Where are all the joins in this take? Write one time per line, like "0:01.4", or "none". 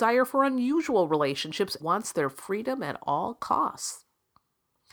0:01.8